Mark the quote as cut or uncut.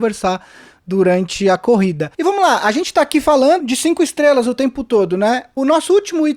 cut